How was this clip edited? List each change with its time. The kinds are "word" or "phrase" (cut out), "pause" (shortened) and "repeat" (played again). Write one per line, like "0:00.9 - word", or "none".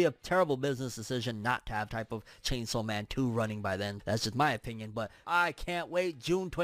0:01.9 - word
0:04.0 - word
0:05.2 - word